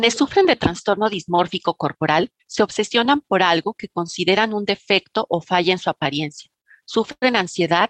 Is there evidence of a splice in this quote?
no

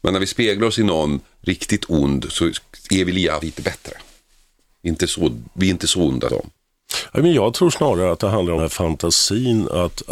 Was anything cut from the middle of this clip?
yes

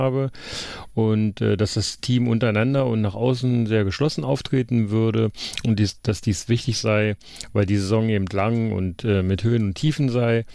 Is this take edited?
no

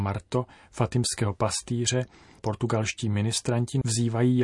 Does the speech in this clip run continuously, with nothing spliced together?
no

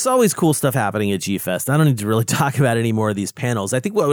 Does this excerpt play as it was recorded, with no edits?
yes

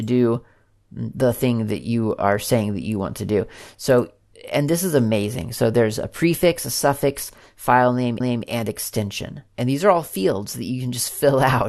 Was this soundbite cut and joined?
yes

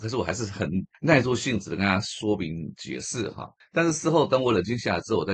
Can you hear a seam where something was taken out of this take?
yes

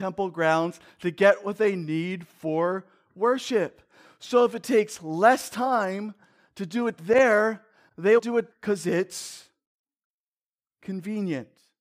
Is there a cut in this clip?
yes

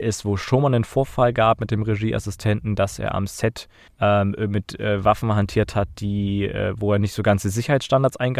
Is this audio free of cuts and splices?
no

